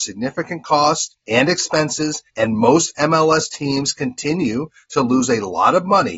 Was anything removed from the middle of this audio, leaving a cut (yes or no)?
yes